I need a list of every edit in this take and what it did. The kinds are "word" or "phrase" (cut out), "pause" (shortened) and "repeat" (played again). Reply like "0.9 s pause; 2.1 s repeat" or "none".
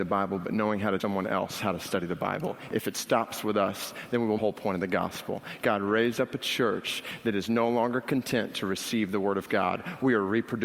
1.0 s word; 4.4 s phrase